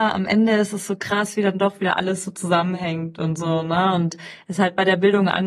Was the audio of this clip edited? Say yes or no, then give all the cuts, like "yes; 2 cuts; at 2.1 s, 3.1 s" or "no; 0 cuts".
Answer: no; 0 cuts